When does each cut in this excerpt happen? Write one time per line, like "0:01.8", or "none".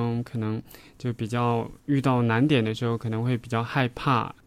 0:01.8